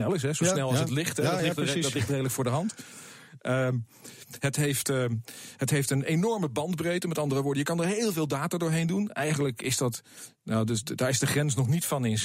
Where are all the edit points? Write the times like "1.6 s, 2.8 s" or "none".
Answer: none